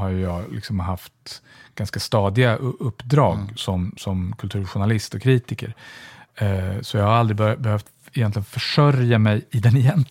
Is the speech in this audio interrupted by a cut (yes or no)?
no